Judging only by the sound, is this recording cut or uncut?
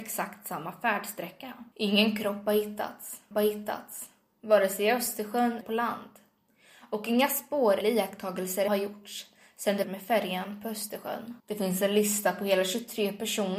cut